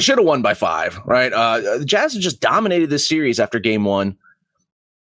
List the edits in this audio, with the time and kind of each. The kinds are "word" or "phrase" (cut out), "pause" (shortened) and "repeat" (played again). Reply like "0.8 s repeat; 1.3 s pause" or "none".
none